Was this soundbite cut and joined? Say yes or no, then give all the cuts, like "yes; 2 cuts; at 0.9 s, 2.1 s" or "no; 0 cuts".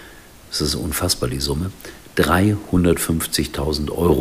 no; 0 cuts